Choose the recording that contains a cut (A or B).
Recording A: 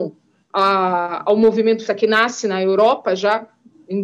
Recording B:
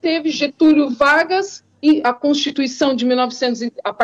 A